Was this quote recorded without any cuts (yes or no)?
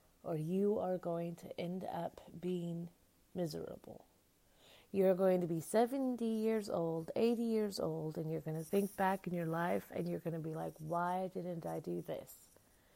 yes